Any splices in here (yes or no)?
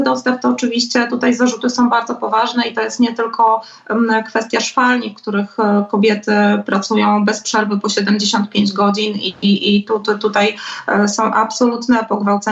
no